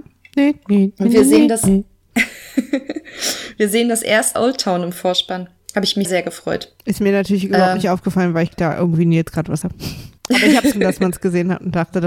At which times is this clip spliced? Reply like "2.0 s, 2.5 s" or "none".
4.3 s, 6.0 s, 6.8 s, 8.5 s, 9.6 s, 10.2 s, 10.7 s